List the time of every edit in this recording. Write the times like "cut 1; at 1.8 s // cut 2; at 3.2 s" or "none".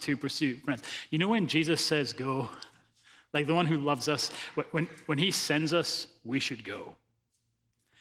none

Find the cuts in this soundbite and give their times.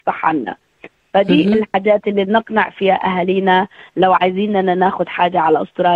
none

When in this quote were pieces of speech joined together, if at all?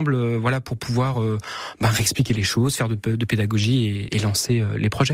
none

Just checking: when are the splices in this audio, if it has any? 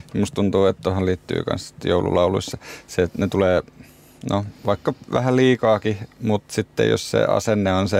none

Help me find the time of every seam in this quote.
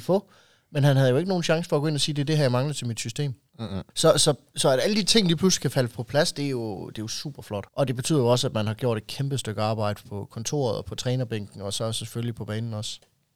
cut 1; at 3.9 s // cut 2; at 7.7 s

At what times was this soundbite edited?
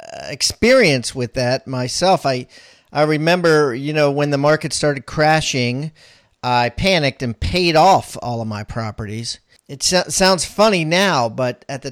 none

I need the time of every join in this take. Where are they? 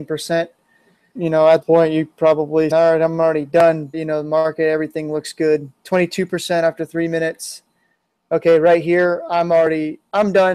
cut 1; at 1.2 s // cut 2; at 1.6 s // cut 3; at 2.2 s // cut 4; at 2.7 s // cut 5; at 3.9 s // cut 6; at 5.8 s

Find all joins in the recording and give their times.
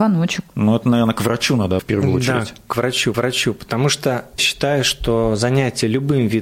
cut 1; at 1.8 s // cut 2; at 3.1 s // cut 3; at 4.4 s

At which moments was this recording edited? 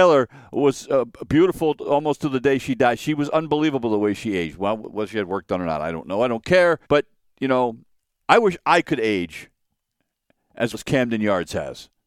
cut 1; at 6.8 s // cut 2; at 8.0 s // cut 3; at 10.7 s

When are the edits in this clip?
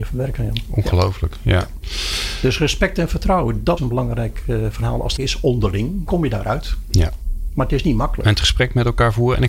cut 1; at 3.8 s // cut 2; at 5.2 s // cut 3; at 6.1 s

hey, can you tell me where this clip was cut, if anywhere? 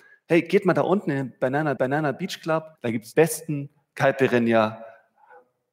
cut 1; at 1.8 s // cut 2; at 2.7 s // cut 3; at 3.1 s

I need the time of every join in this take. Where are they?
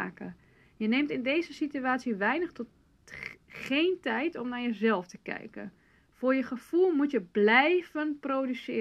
none

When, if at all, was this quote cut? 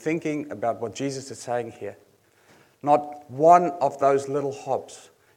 none

